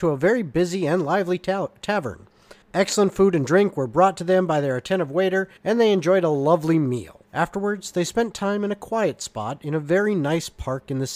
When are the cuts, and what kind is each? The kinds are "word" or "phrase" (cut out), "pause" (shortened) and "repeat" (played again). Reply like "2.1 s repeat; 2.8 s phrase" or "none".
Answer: 2.6 s pause; 5.6 s pause; 7.2 s pause

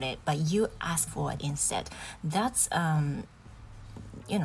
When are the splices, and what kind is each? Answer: 1.1 s word; 1.4 s word

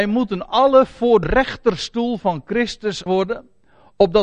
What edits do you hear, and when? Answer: 1.2 s word; 3.1 s word

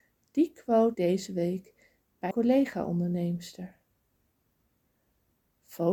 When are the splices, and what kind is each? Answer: 0.9 s phrase; 2.3 s word

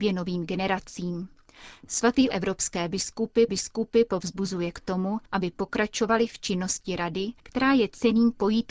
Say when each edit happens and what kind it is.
2.3 s phrase; 3.5 s repeat; 5.3 s pause; 7.4 s pause

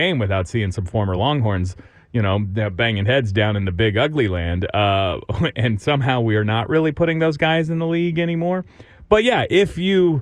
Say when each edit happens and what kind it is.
none

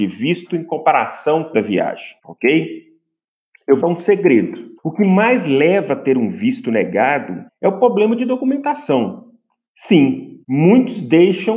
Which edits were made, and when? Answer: 1.5 s phrase; 2.2 s pause; 3.8 s phrase; 4.8 s pause; 7.5 s pause; 10.4 s pause

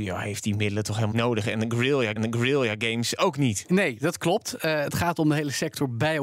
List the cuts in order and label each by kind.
1.1 s word; 2.2 s repeat

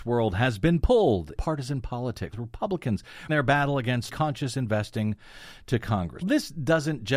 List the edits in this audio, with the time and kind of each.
1.3 s word; 2.3 s word; 3.3 s word; 4.1 s word; 6.2 s word

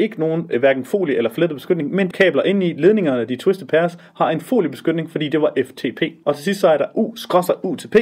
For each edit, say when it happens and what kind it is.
2.1 s phrase

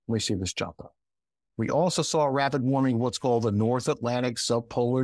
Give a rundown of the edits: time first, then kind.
1.2 s pause

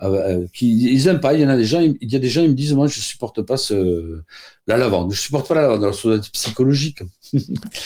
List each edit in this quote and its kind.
none

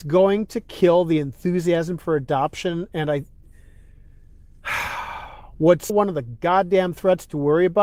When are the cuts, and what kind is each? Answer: 5.9 s word

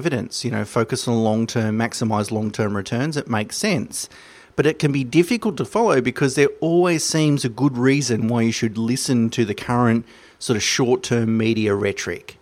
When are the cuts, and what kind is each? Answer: none

